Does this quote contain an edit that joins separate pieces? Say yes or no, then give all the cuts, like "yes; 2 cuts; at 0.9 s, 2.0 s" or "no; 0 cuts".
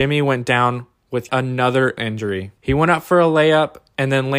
yes; 3 cuts; at 1.3 s, 2.0 s, 2.6 s